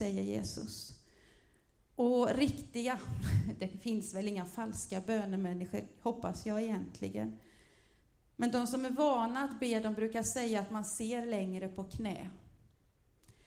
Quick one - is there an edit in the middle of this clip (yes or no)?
no